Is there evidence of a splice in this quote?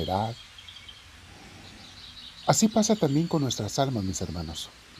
no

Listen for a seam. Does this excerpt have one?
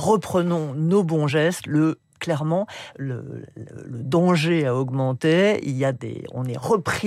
no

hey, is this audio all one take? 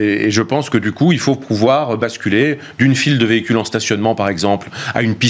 yes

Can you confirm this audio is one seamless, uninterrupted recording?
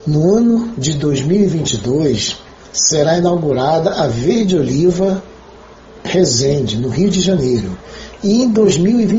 yes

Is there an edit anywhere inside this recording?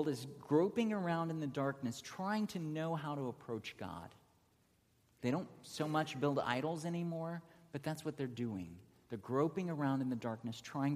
no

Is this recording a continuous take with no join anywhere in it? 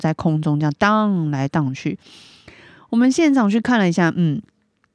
yes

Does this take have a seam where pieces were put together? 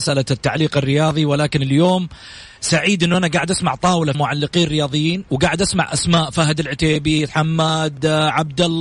yes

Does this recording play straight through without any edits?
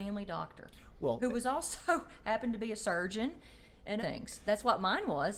no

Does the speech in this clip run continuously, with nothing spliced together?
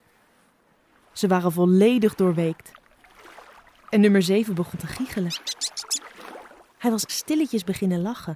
no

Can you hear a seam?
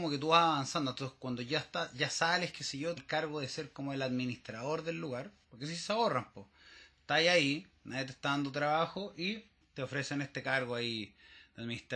yes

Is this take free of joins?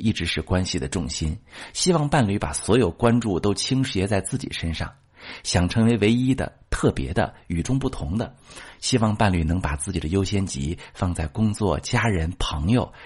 yes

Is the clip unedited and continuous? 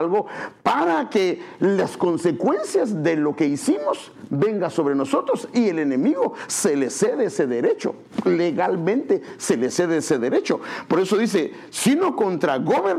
yes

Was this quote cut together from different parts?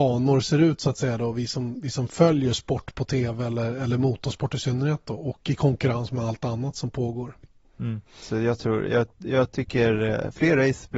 yes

